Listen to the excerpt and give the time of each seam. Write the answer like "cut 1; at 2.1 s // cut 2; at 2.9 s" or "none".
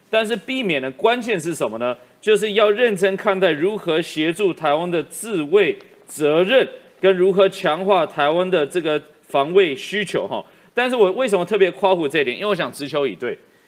none

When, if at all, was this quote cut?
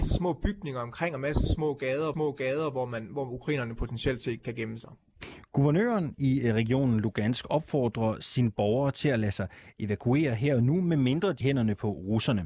cut 1; at 2.1 s // cut 2; at 4.4 s // cut 3; at 11.4 s

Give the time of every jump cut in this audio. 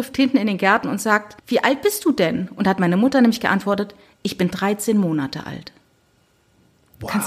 cut 1; at 1.4 s

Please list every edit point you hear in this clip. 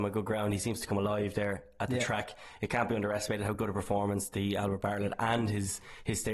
none

